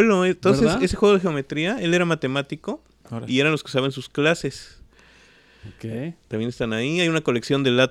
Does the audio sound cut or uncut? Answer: uncut